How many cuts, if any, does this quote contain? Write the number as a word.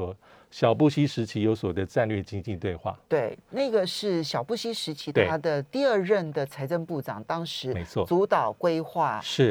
zero